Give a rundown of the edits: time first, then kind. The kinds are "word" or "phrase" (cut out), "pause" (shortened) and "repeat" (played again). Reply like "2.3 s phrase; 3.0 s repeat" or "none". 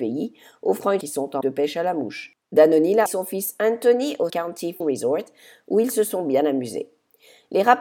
1.0 s phrase; 1.4 s word; 2.4 s pause; 3.1 s word; 4.3 s word; 4.8 s word